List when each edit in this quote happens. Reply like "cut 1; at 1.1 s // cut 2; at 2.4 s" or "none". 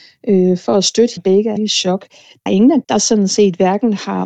cut 1; at 1.2 s // cut 2; at 1.6 s // cut 3; at 2.5 s // cut 4; at 2.8 s